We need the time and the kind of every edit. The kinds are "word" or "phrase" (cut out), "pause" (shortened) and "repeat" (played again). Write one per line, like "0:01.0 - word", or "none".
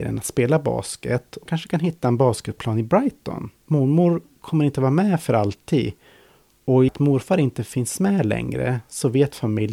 0:01.5 - word
0:03.6 - pause
0:06.9 - phrase